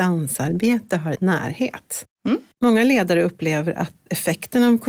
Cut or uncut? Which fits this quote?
cut